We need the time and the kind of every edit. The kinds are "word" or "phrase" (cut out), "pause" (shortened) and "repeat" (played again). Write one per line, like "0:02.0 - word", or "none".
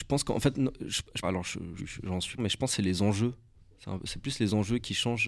0:01.2 - phrase
0:01.8 - word
0:02.4 - phrase